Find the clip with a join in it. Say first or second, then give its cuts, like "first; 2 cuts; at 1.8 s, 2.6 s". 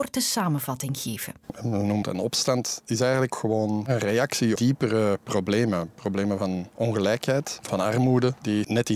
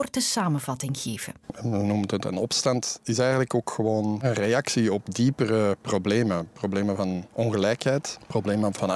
first; 4 cuts; at 2.0 s, 3.3 s, 4.6 s, 7.6 s